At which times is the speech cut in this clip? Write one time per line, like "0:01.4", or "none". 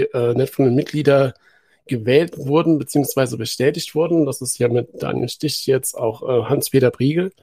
none